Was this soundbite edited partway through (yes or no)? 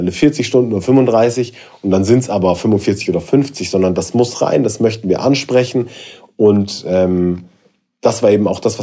no